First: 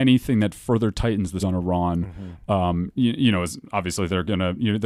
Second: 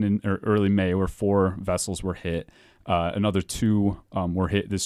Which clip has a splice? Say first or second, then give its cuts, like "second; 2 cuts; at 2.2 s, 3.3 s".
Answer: first; 1 cut; at 1.4 s